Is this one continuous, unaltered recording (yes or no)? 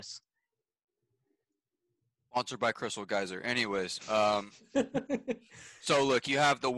yes